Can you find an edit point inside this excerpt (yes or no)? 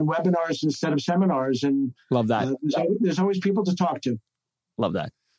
no